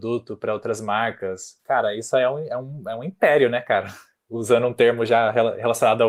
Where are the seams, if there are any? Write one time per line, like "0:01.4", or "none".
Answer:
none